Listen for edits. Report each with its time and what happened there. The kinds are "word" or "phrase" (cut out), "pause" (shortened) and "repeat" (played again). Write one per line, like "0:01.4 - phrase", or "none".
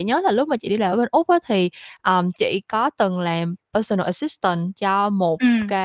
none